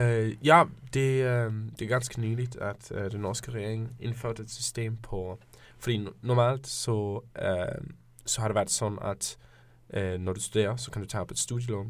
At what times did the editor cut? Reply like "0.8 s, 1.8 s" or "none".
none